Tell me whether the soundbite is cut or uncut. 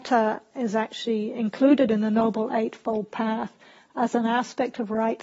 uncut